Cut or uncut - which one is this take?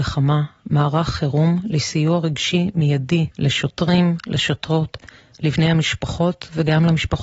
cut